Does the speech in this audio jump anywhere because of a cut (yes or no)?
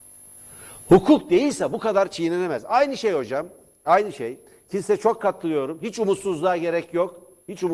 no